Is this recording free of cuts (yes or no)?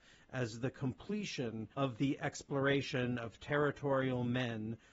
no